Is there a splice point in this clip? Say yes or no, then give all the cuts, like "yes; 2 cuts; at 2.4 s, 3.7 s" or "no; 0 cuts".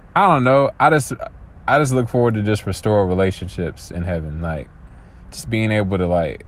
no; 0 cuts